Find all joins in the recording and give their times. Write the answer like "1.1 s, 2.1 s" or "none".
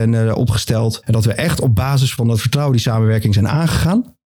none